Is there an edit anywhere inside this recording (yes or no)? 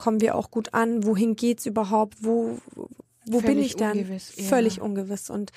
no